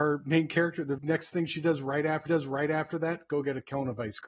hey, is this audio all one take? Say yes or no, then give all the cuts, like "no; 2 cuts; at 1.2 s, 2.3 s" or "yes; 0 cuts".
no; 2 cuts; at 1.0 s, 2.3 s